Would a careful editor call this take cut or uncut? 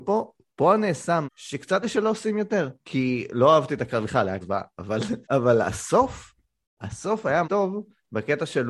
cut